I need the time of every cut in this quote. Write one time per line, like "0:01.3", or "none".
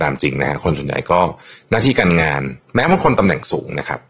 none